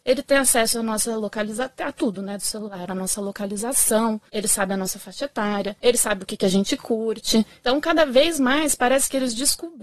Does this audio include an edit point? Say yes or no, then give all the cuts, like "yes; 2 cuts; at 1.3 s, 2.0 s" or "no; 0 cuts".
no; 0 cuts